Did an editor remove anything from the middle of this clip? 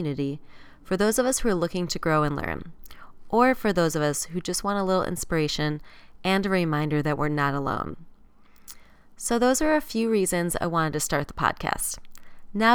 no; 0 cuts

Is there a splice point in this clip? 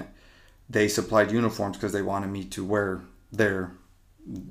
no; 0 cuts

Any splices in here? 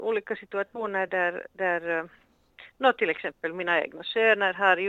no; 0 cuts

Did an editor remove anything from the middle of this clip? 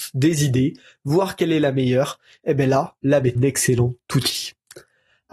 yes; 1 cut; at 3.4 s

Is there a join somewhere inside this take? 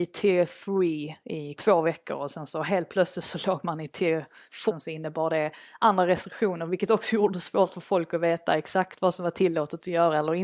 yes; 2 cuts; at 1.6 s, 4.7 s

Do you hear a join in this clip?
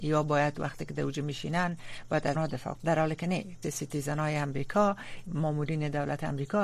yes; 4 cuts; at 2.3 s, 2.7 s, 3.6 s, 5.3 s

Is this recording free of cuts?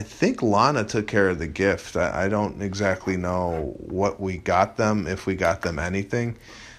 yes; 0 cuts

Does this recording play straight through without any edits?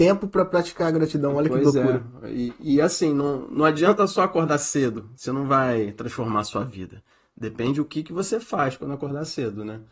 yes; 0 cuts

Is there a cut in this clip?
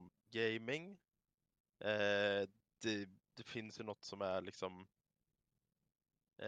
no; 0 cuts

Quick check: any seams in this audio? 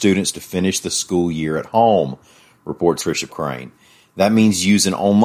yes; 2 cuts; at 3.0 s, 3.3 s

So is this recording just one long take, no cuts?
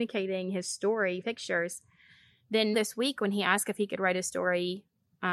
no; 2 cuts; at 1.2 s, 2.7 s

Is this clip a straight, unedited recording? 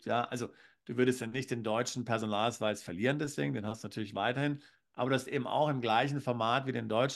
yes; 0 cuts

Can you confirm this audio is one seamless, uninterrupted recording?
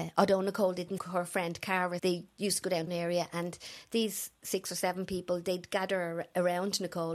no; 3 cuts; at 1.0 s, 2.0 s, 2.9 s

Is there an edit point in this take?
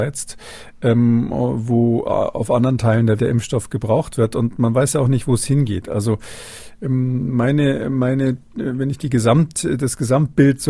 yes; 1 cut; at 3.2 s

